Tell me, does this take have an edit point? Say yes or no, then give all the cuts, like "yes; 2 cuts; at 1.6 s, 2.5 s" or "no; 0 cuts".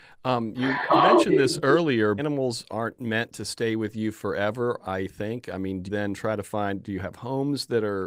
yes; 2 cuts; at 2.2 s, 5.9 s